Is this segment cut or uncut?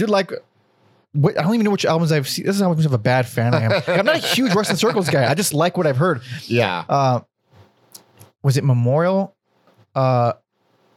uncut